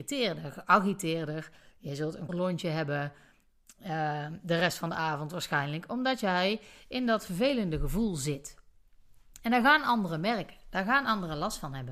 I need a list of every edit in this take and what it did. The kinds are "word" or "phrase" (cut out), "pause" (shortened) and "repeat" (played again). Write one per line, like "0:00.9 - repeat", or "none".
0:02.3 - word